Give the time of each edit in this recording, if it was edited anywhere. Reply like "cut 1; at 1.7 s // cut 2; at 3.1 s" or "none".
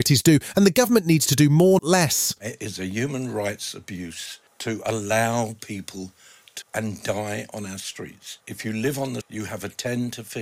cut 1; at 1.8 s // cut 2; at 4.5 s // cut 3; at 6.6 s // cut 4; at 8.4 s // cut 5; at 9.2 s